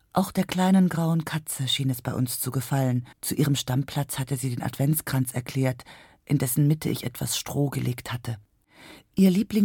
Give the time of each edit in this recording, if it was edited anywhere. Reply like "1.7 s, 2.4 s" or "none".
3.1 s